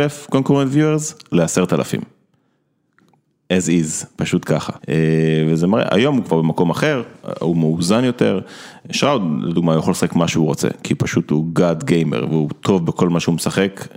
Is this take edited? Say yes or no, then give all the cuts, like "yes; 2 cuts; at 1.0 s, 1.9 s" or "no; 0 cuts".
no; 0 cuts